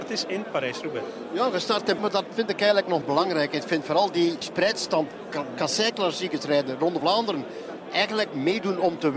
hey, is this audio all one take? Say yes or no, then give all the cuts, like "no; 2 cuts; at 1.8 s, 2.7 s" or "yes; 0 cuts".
no; 4 cuts; at 2.0 s, 3.0 s, 4.4 s, 7.0 s